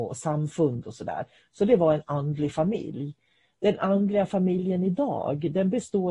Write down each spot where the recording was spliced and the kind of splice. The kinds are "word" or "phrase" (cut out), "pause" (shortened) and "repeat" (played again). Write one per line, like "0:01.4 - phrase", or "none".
none

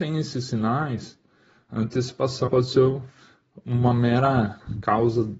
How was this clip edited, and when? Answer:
0:02.5 - word

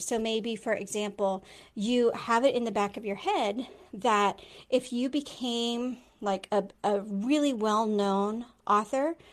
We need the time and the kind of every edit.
none

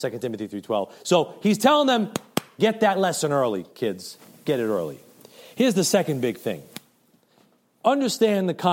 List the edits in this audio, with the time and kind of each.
none

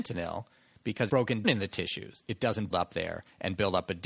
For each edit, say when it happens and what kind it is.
0:01.1 - word
0:01.4 - word
0:02.7 - word

